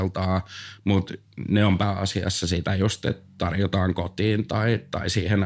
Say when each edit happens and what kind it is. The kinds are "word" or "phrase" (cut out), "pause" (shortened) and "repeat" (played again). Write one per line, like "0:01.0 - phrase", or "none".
none